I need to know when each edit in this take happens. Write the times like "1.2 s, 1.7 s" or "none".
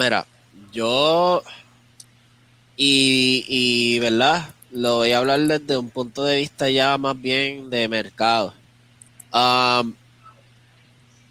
none